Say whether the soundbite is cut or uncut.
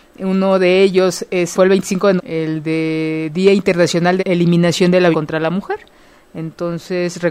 cut